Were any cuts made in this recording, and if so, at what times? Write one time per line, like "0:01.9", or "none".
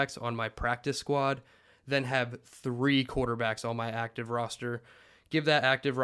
none